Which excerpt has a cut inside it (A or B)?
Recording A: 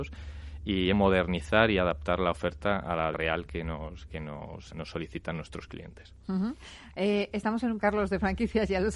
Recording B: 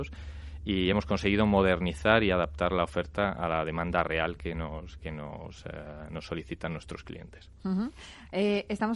A